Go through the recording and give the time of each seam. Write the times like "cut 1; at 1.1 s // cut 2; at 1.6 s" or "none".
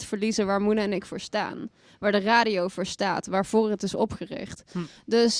none